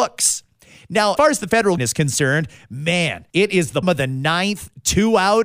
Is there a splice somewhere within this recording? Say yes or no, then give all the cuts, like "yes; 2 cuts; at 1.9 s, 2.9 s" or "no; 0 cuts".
yes; 4 cuts; at 1.2 s, 1.8 s, 3.3 s, 3.8 s